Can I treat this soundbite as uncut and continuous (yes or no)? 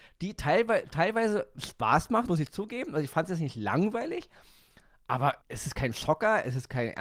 no